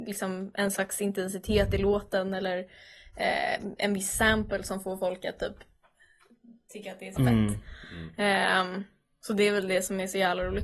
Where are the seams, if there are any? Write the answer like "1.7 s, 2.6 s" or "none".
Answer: 7.2 s